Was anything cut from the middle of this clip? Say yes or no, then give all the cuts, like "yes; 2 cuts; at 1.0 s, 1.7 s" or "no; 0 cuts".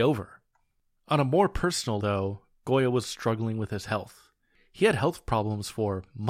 yes; 2 cuts; at 2.0 s, 3.0 s